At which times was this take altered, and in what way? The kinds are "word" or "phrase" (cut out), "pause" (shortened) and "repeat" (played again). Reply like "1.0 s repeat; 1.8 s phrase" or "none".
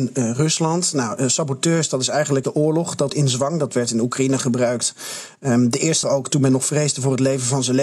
2.4 s word; 3.1 s word; 6.0 s word

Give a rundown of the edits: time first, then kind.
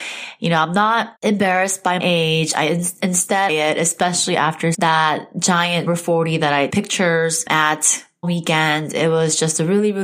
1.2 s pause; 2.0 s word; 3.5 s phrase; 4.7 s word; 5.9 s word; 6.7 s word; 8.2 s word

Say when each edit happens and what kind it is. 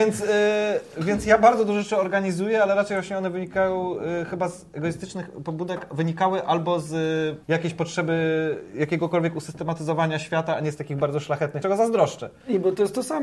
7.4 s pause; 11.6 s word

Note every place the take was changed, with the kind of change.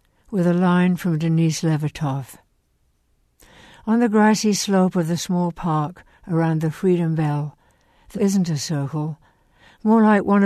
8.1 s word

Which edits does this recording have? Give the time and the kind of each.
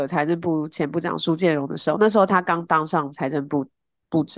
none

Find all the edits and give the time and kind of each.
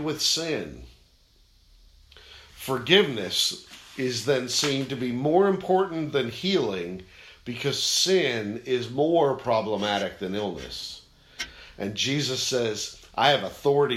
none

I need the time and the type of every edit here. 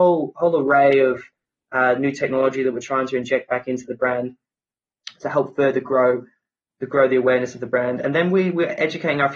none

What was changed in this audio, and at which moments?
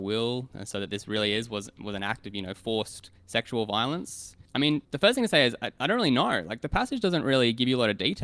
3.2 s pause; 4.4 s pause; 4.8 s pause

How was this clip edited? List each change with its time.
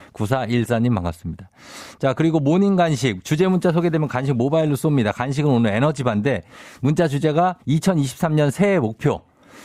7.6 s pause

